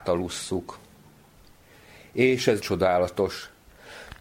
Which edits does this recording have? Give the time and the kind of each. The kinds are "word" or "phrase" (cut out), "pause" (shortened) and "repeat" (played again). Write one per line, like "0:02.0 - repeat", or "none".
0:02.6 - word